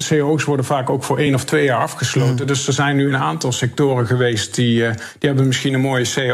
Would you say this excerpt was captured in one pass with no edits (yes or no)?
yes